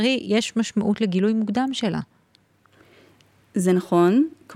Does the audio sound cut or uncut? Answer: uncut